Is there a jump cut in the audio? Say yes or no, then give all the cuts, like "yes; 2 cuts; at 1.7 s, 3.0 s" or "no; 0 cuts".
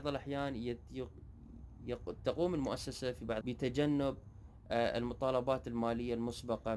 yes; 1 cut; at 3.4 s